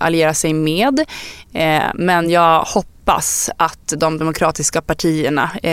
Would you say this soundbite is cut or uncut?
uncut